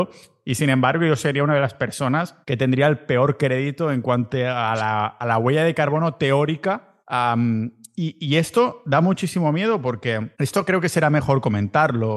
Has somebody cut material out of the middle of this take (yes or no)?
yes